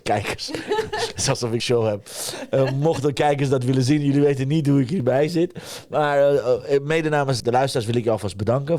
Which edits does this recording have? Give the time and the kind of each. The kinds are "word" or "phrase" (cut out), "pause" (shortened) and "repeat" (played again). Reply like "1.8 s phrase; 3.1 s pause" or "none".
1.6 s word; 7.4 s word